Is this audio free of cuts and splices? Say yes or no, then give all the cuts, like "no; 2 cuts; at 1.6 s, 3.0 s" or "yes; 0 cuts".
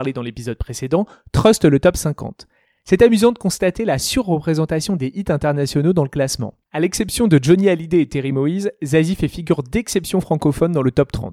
yes; 0 cuts